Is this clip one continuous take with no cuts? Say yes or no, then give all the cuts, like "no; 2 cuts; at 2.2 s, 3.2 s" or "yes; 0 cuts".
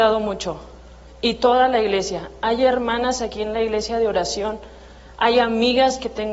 yes; 0 cuts